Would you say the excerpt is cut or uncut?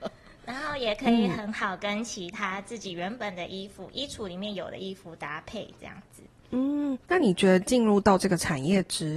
cut